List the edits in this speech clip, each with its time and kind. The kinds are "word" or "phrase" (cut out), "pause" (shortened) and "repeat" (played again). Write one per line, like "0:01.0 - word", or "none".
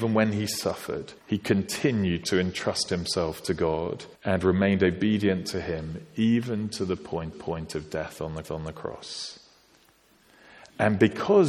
0:01.2 - pause
0:04.1 - pause
0:07.3 - repeat
0:08.4 - repeat